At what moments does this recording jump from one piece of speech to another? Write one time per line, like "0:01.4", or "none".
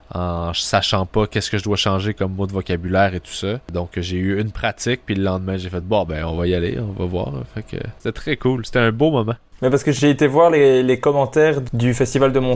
none